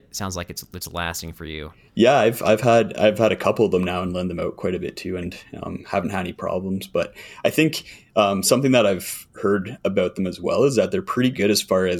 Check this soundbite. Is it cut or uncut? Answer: uncut